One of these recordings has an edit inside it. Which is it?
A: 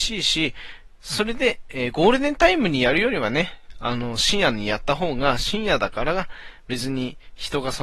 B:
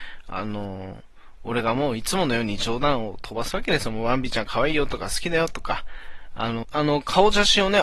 B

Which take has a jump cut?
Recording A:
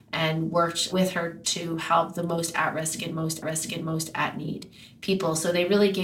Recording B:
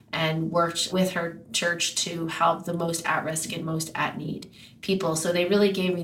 A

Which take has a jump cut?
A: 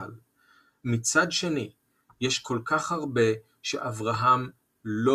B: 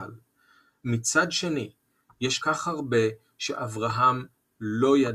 B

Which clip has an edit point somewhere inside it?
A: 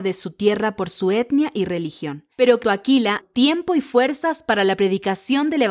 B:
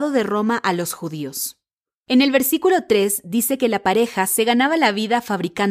A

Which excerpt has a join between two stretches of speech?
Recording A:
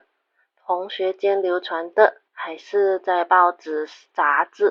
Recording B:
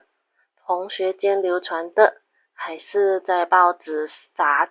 A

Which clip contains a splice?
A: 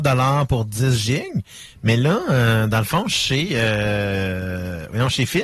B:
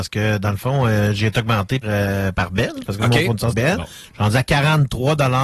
B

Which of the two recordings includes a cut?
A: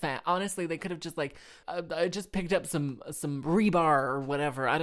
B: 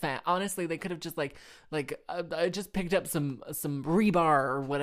A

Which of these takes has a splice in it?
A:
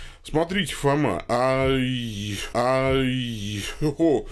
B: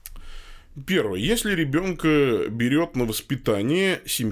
A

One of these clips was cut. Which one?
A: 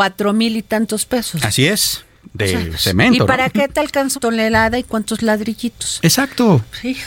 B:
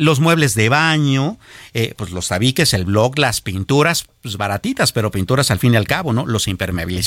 A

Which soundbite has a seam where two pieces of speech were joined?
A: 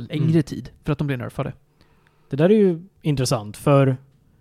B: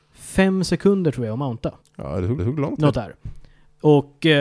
B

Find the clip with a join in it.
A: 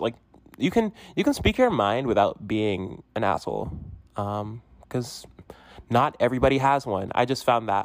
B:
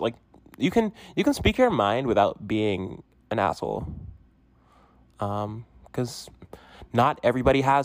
A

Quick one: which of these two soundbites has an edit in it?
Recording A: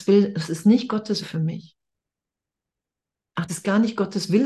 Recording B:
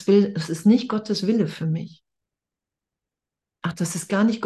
A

